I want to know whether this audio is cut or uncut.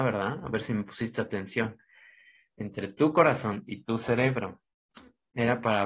uncut